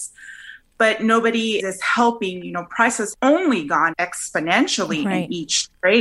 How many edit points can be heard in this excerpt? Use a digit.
3